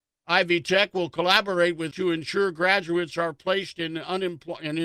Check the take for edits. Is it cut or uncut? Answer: cut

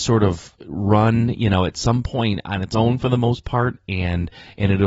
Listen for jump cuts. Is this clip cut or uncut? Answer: uncut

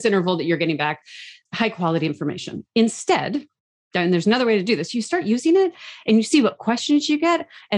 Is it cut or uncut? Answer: uncut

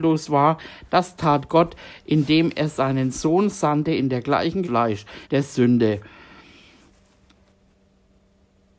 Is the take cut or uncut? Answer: cut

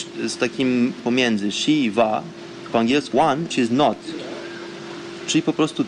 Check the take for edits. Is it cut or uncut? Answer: cut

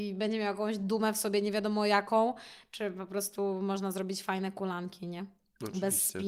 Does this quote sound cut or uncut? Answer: uncut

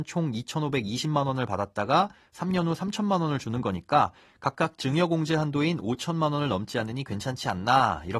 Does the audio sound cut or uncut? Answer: uncut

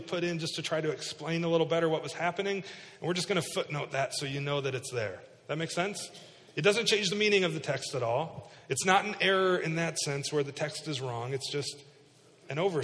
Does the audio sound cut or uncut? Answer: uncut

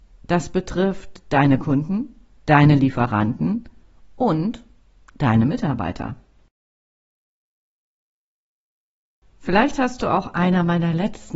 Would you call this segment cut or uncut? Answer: uncut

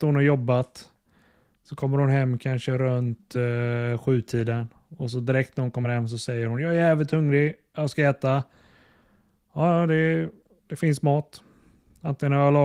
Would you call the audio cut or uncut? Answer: uncut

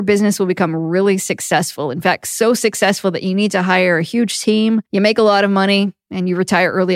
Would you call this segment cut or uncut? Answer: cut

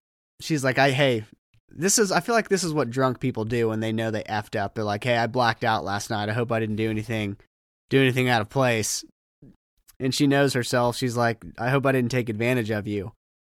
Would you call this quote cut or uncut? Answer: uncut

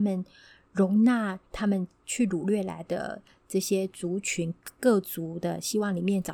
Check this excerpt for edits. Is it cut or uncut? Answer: cut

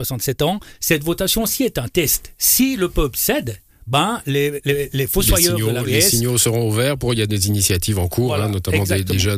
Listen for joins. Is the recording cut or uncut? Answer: uncut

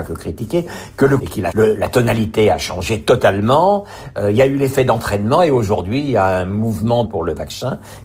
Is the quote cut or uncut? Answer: cut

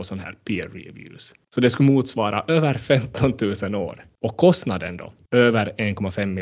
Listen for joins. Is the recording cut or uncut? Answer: uncut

